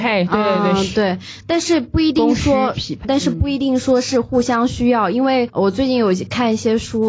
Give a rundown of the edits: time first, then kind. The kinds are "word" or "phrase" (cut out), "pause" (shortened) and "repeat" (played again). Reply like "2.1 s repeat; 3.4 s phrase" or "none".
3.0 s word